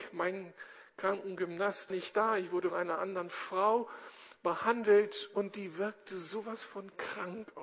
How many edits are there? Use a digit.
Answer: 2